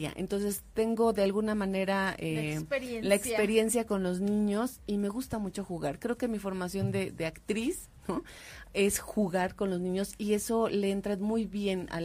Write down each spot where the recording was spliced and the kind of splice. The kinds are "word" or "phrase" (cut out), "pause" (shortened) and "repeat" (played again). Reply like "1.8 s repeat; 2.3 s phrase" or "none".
none